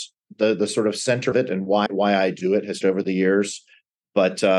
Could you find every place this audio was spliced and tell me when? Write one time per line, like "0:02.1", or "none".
0:01.3
0:01.9
0:02.8